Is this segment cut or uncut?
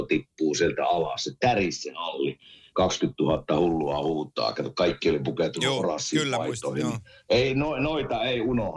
uncut